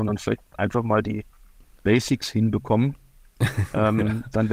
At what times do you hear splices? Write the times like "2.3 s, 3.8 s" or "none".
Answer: 1.8 s